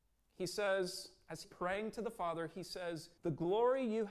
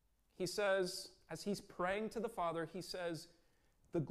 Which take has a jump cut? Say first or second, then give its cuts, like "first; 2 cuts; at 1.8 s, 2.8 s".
first; 2 cuts; at 1.4 s, 3.2 s